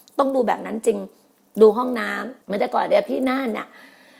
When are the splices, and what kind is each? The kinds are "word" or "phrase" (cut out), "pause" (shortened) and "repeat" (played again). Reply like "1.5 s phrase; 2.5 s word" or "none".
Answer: 2.4 s pause